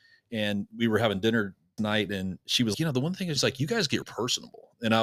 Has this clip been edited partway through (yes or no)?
yes